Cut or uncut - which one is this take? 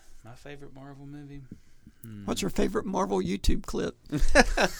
uncut